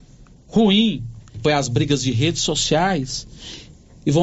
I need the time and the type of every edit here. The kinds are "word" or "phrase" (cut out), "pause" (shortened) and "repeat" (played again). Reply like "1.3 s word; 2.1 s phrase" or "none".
1.4 s phrase